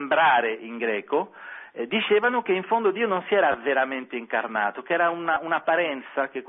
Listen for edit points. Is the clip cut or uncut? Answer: uncut